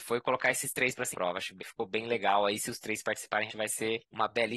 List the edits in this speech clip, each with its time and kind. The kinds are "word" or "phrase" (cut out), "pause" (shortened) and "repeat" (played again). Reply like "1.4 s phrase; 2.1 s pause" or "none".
1.1 s phrase; 1.6 s word; 3.5 s word